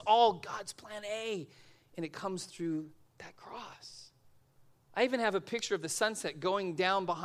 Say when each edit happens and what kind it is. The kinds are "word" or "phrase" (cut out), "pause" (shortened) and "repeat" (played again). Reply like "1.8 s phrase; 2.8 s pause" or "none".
none